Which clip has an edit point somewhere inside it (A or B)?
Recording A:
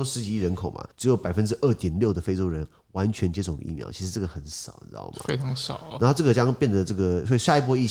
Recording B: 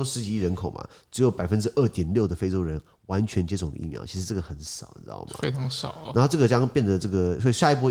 A